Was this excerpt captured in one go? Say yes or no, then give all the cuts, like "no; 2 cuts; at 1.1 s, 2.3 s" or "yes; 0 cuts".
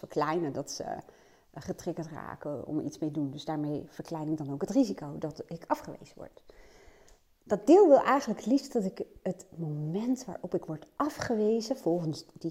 yes; 0 cuts